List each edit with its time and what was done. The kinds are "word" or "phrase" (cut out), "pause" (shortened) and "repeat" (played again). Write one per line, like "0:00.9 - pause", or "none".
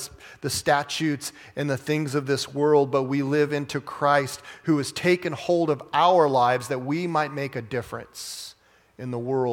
none

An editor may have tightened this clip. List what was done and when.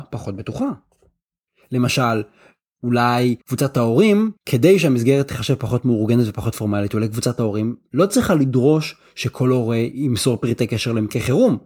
0:03.4 - pause
0:04.4 - pause

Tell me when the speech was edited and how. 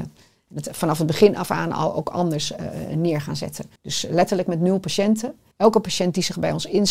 0:03.8 - pause
0:05.5 - pause

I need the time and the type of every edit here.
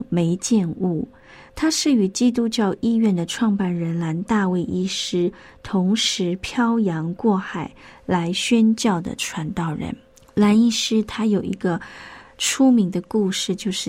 0:10.1 - pause

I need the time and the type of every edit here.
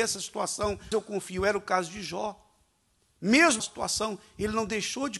0:00.9 - word
0:03.6 - word

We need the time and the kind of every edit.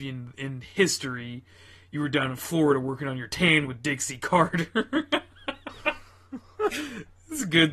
none

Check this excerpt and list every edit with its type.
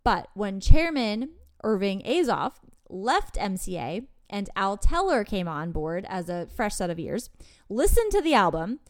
none

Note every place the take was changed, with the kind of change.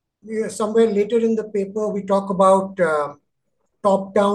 none

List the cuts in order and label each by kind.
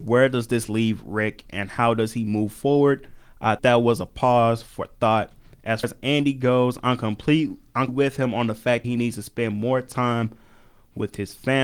0:03.6 - word
0:05.8 - word
0:07.9 - word
0:08.8 - word

